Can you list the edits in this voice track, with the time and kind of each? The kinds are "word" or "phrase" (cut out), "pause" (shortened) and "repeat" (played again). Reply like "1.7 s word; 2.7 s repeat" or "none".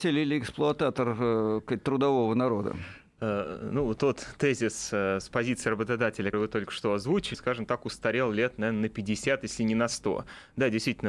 4.0 s word; 6.3 s word; 7.3 s word